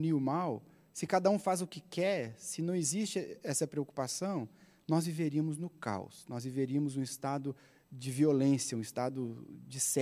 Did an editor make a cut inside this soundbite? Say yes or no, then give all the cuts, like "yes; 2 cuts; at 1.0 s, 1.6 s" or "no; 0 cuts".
no; 0 cuts